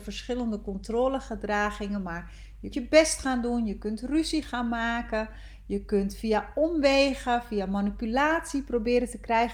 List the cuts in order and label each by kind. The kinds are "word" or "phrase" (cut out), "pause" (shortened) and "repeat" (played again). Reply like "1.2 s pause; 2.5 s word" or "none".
2.7 s word